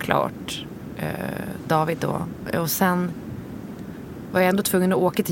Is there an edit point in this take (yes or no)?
no